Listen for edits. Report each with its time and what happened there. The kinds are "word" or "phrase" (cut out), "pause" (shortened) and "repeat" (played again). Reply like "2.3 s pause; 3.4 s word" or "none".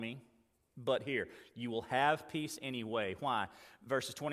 none